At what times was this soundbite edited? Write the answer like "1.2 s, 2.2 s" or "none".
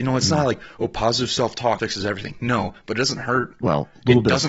1.8 s